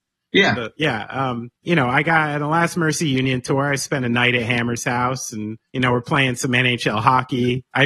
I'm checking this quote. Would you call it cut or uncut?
cut